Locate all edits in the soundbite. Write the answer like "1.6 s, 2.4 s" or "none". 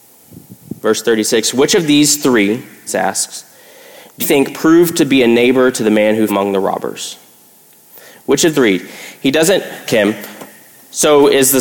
2.9 s, 4.2 s, 6.3 s, 8.5 s, 9.9 s